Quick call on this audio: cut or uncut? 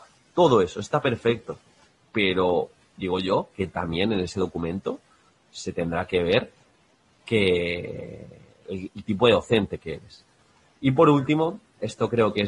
uncut